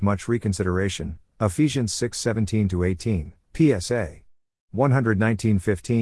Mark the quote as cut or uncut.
uncut